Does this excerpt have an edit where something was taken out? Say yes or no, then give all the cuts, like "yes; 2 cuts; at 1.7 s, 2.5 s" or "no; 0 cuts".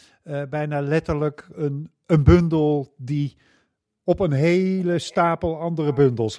no; 0 cuts